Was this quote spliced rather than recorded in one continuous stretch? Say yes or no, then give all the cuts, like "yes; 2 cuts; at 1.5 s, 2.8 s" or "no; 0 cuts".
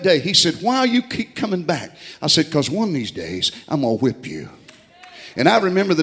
no; 0 cuts